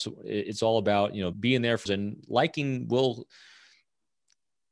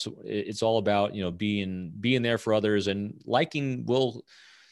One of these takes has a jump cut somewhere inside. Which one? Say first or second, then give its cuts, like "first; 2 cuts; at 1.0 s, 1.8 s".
first; 2 cuts; at 1.3 s, 1.9 s